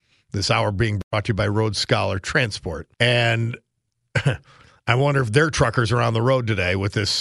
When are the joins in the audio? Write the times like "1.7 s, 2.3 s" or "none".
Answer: 2.9 s